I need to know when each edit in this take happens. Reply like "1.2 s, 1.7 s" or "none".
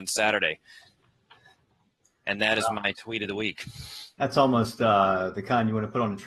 none